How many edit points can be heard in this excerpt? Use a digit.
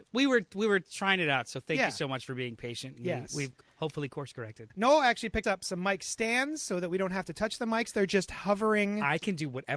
2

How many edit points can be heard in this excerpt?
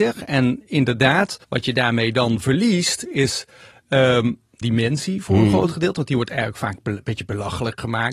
2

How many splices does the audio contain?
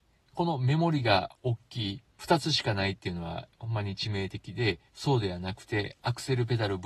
1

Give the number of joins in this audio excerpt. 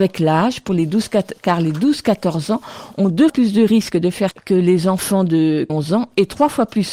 3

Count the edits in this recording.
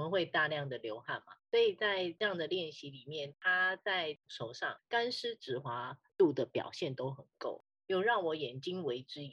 1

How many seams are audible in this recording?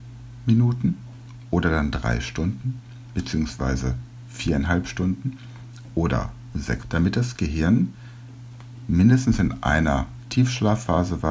1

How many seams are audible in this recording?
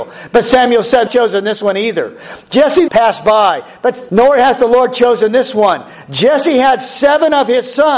3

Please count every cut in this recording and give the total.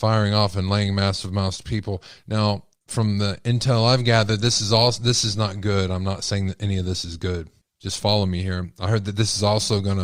1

